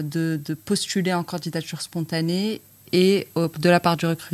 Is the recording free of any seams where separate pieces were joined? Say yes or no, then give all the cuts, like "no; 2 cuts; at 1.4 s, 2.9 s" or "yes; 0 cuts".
yes; 0 cuts